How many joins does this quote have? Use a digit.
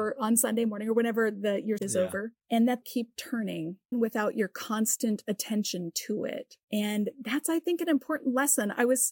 4